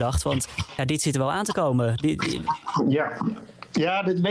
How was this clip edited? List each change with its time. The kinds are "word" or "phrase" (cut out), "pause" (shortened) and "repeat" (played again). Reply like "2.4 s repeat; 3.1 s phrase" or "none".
none